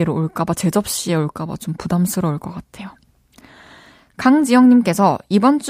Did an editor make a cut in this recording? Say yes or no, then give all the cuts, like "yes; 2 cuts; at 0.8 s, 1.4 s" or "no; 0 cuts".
no; 0 cuts